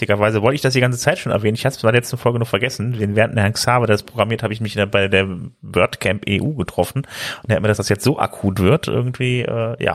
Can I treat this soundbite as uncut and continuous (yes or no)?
no